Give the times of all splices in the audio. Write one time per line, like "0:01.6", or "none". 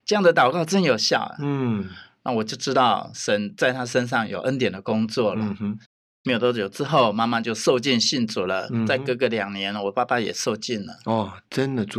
none